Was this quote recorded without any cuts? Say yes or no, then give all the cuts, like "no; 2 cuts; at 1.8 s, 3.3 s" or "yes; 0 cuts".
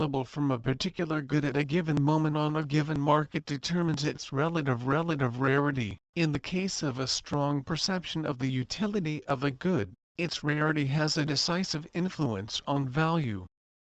no; 1 cut; at 6.0 s